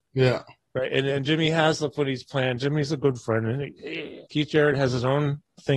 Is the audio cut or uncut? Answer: cut